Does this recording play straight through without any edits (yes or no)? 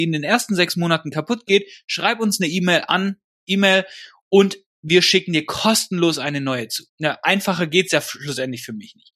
no